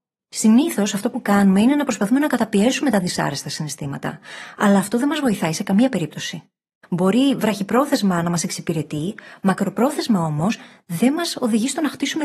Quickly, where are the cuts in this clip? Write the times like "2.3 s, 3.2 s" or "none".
none